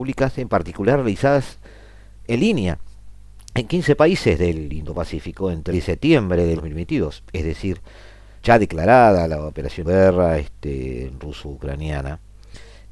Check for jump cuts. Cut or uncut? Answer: cut